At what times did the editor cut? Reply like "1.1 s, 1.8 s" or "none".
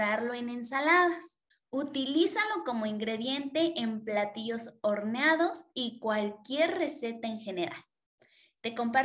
1.5 s